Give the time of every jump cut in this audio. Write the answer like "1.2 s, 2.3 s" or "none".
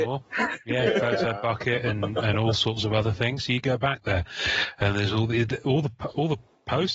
none

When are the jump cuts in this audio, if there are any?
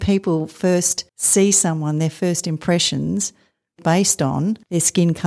1.1 s, 3.8 s

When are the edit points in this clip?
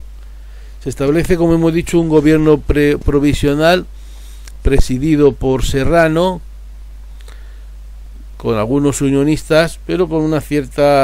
none

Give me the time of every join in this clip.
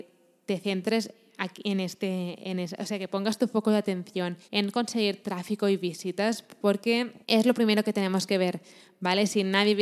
4.4 s, 7.2 s

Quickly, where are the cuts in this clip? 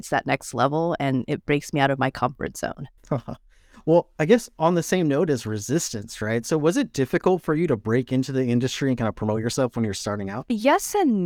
3.0 s

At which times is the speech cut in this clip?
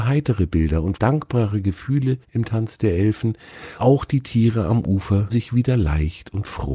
0.9 s, 2.2 s, 3.8 s, 5.3 s

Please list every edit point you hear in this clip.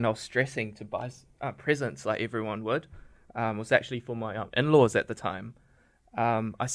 none

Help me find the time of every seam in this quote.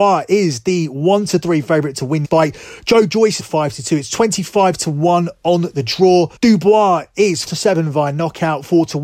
2.2 s, 3.4 s, 6.4 s, 7.5 s

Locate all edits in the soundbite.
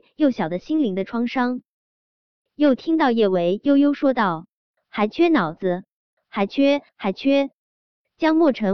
none

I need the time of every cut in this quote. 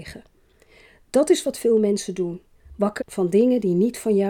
3.0 s

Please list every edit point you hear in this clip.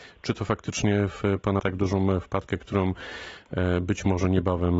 1.6 s

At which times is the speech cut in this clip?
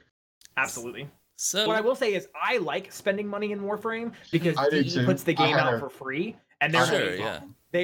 1.7 s

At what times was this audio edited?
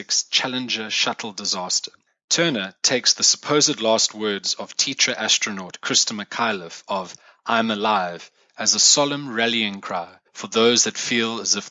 none

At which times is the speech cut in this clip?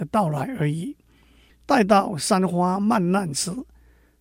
none

